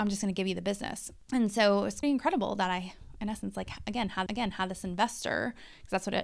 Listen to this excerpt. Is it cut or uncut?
cut